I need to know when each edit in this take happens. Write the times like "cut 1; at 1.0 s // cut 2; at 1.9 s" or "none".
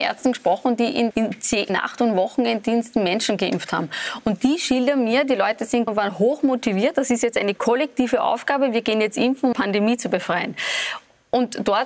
cut 1; at 1.1 s // cut 2; at 1.7 s // cut 3; at 5.9 s // cut 4; at 9.5 s